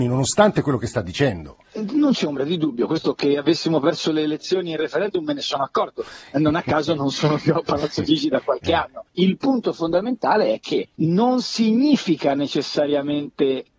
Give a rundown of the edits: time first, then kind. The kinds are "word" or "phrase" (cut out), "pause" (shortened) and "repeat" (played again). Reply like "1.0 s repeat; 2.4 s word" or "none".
1.6 s pause; 9.1 s pause; 10.9 s pause